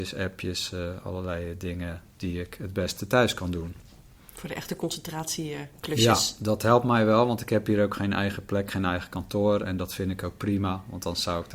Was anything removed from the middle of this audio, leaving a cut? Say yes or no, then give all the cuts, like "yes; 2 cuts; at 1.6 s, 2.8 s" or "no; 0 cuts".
no; 0 cuts